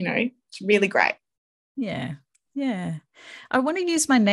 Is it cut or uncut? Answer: uncut